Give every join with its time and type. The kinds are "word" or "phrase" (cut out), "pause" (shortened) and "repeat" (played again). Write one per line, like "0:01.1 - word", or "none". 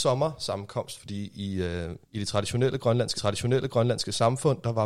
0:02.0 - pause
0:03.1 - repeat